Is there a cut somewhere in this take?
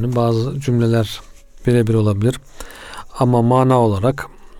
no; 0 cuts

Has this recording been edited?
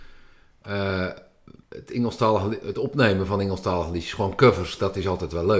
no; 0 cuts

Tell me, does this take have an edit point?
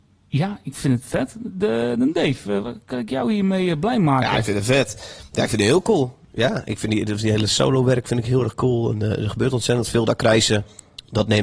yes; 1 cut; at 2.6 s

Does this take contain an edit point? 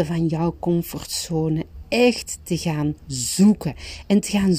yes; 1 cut; at 3.0 s

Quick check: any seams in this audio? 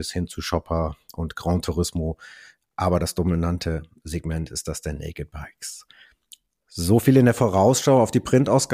no; 0 cuts

